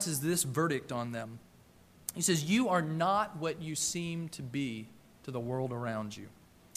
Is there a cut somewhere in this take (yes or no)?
no